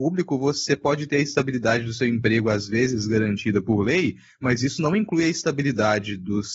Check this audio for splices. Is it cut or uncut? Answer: uncut